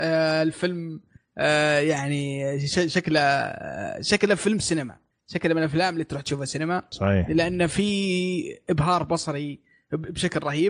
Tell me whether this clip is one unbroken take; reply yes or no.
yes